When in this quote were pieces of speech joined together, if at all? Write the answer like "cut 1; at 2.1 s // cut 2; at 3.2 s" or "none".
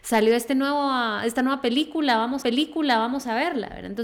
cut 1; at 2.4 s